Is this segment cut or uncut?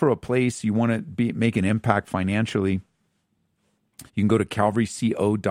cut